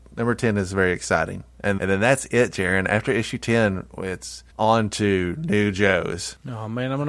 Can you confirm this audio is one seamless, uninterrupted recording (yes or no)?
no